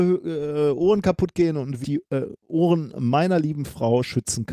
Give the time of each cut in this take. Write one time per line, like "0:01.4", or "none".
0:01.8